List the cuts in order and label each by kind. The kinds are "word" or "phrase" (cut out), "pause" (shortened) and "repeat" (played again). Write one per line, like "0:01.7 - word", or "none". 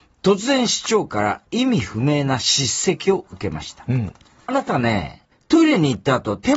0:04.5 - phrase
0:05.3 - pause